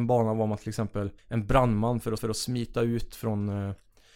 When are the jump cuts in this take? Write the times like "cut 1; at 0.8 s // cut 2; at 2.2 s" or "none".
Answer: cut 1; at 1.2 s // cut 2; at 2.2 s

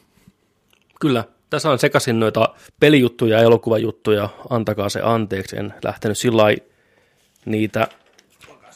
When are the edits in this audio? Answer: none

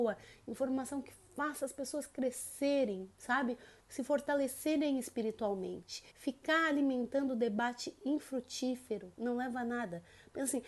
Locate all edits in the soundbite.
cut 1; at 6.1 s // cut 2; at 9.1 s

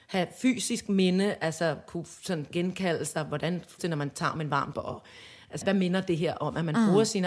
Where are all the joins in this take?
cut 1; at 3.8 s // cut 2; at 4.7 s // cut 3; at 5.6 s

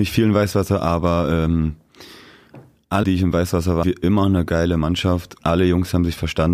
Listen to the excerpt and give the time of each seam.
cut 1; at 3.0 s // cut 2; at 3.8 s // cut 3; at 5.4 s

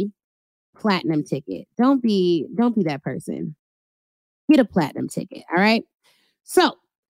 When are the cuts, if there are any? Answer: none

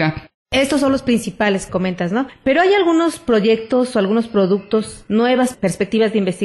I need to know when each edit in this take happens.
cut 1; at 1.7 s

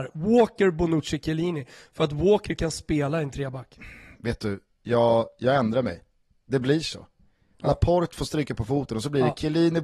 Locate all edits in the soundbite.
none

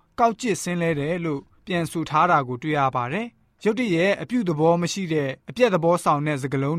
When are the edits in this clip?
cut 1; at 5.4 s

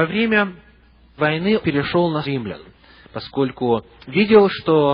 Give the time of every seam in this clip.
cut 1; at 1.2 s // cut 2; at 1.6 s // cut 3; at 2.2 s

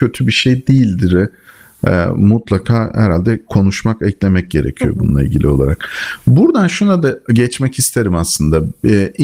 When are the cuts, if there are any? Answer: none

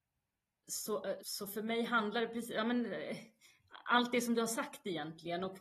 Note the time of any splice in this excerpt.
cut 1; at 1.2 s

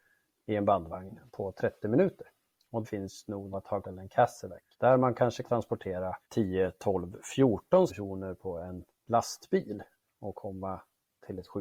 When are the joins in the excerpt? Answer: cut 1; at 1.3 s // cut 2; at 2.8 s // cut 3; at 3.5 s // cut 4; at 3.8 s // cut 5; at 4.7 s // cut 6; at 5.4 s // cut 7; at 6.2 s // cut 8; at 7.9 s

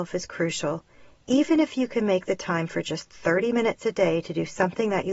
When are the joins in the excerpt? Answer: none

